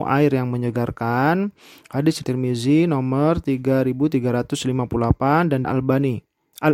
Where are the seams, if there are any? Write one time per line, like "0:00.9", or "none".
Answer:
0:02.2
0:05.6